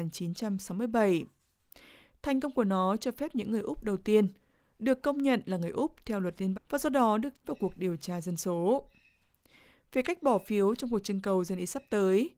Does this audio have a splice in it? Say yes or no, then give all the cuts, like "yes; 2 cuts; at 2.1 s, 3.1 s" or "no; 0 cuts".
yes; 2 cuts; at 6.5 s, 7.4 s